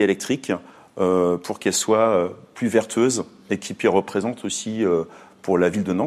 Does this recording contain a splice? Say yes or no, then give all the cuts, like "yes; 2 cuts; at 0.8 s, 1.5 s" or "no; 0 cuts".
no; 0 cuts